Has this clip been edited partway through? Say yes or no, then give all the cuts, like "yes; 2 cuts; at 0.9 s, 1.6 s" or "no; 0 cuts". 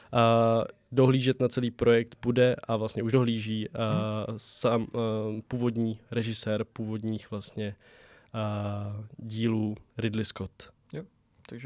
no; 0 cuts